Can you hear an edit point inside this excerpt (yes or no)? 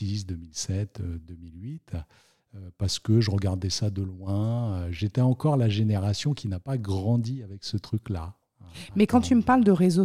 no